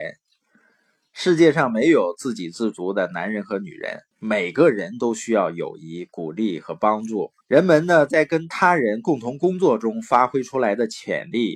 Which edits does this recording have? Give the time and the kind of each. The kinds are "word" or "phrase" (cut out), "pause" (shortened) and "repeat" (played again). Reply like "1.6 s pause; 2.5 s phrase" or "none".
4.1 s pause; 7.4 s pause

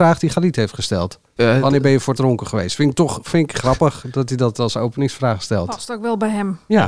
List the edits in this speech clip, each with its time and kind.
2.2 s phrase

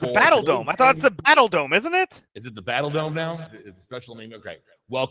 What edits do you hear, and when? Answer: 2.3 s pause; 3.5 s word

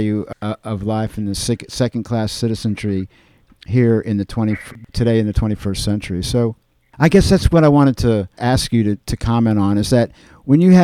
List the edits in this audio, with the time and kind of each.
none

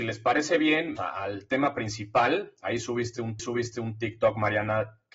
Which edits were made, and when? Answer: 1.0 s word; 3.4 s repeat

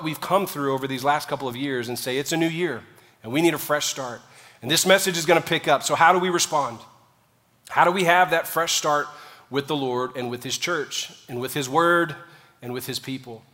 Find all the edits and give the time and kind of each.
none

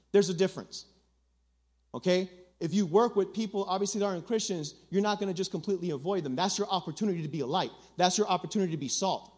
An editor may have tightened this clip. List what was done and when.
none

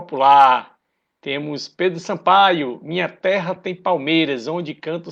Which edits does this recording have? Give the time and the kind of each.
none

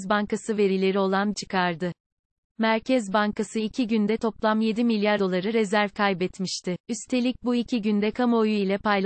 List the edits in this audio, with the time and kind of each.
1.3 s phrase; 5.2 s word; 6.8 s pause

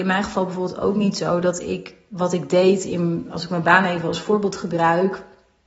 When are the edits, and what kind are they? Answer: none

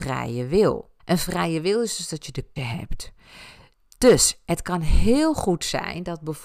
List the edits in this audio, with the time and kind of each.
1.0 s pause; 2.6 s word

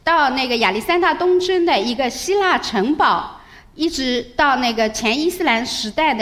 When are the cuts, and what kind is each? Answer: none

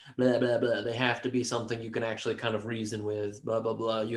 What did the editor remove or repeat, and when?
none

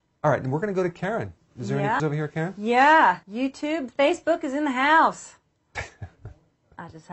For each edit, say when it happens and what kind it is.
2.0 s word; 3.2 s pause

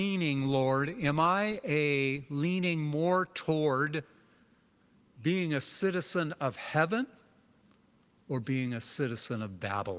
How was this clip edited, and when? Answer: none

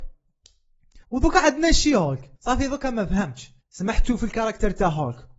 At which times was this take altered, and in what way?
1.0 s pause; 2.4 s pause; 3.6 s pause

